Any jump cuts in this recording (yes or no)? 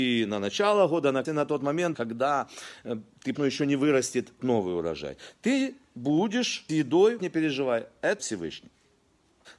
yes